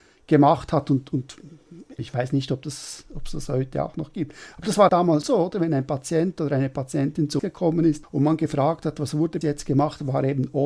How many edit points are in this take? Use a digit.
5